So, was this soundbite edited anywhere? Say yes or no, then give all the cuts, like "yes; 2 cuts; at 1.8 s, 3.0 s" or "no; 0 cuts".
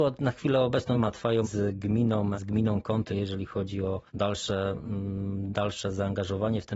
yes; 5 cuts; at 0.9 s, 1.4 s, 2.4 s, 3.1 s, 4.1 s